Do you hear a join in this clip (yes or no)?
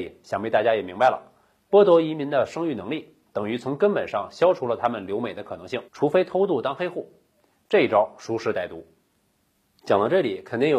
yes